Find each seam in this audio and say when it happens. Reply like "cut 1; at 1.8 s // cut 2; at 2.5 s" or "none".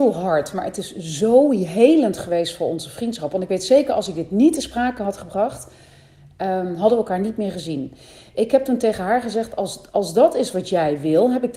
none